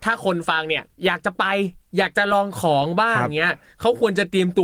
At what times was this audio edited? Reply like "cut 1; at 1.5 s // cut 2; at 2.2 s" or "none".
cut 1; at 0.9 s